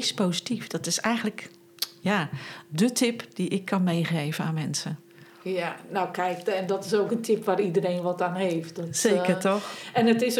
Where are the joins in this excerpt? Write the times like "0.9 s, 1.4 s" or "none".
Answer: none

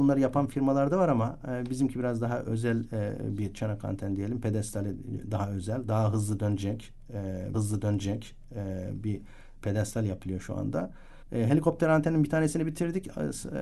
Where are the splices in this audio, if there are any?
7.5 s, 11.2 s

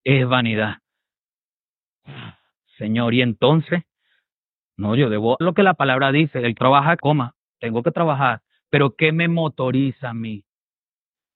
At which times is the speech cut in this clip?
5.4 s, 6.6 s, 7.0 s

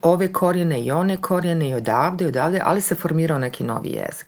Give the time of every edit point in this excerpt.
none

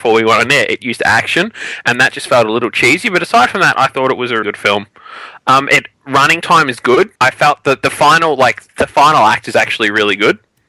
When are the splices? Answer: 4.4 s, 5.9 s, 7.2 s

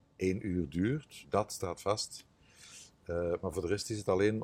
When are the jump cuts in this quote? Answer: 1.2 s

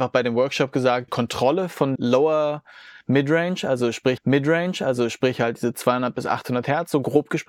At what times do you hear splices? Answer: 1.1 s, 2.0 s, 4.2 s

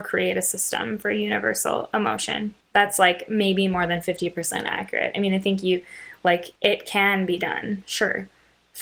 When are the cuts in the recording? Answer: 2.6 s, 6.6 s

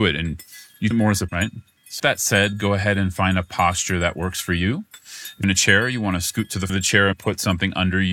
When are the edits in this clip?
0.9 s, 1.3 s, 2.0 s, 5.4 s, 6.7 s, 7.1 s

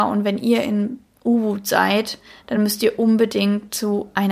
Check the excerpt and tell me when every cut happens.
none

